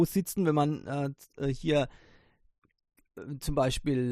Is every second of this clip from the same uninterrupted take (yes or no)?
yes